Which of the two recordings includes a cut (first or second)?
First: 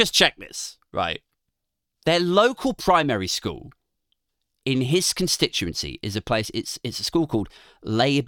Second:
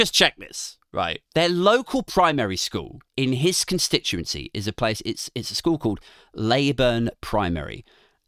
second